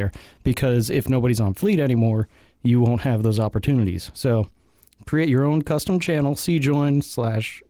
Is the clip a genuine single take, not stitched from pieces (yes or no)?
yes